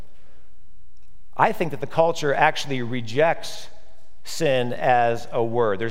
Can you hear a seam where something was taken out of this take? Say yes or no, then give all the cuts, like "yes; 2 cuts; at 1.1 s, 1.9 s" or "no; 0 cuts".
no; 0 cuts